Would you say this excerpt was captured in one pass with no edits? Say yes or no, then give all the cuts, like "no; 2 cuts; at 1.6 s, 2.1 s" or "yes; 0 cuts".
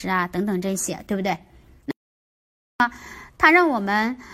yes; 0 cuts